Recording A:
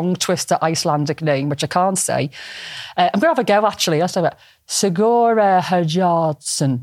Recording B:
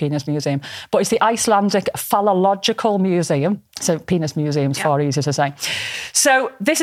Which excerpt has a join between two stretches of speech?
B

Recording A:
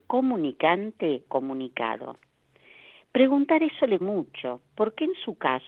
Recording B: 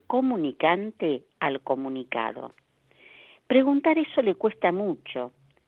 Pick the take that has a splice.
A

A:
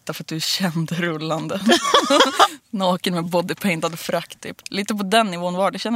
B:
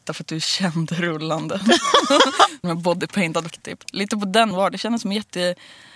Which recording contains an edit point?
B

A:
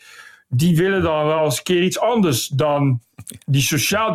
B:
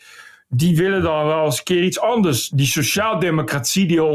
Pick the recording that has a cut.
B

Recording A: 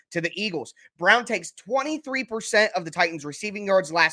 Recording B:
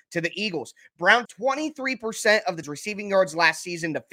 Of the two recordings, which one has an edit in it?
B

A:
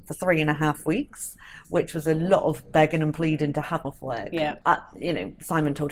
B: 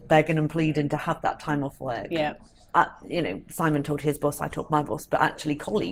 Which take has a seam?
A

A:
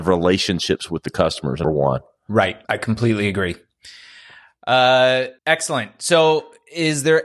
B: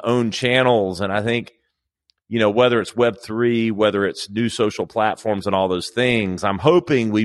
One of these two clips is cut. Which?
A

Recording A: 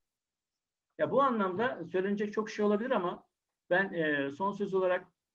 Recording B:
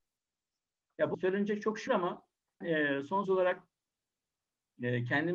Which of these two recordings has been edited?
B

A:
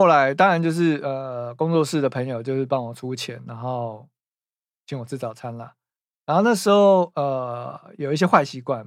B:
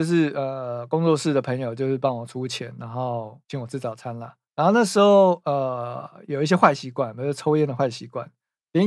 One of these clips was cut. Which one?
B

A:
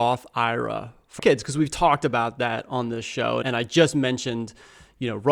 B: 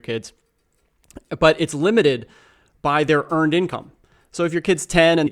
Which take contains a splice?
A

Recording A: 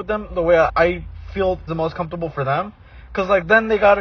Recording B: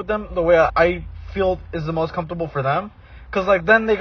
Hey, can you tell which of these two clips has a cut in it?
A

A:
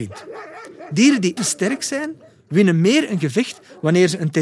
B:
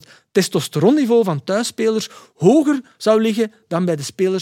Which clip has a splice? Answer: A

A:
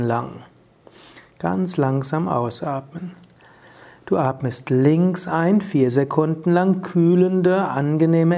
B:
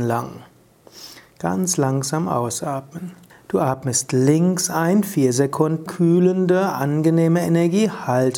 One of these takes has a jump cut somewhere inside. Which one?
B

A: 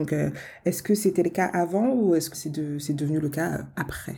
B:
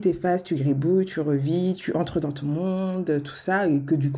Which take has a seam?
A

